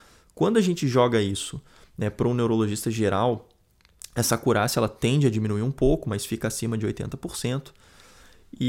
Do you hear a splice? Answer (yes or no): no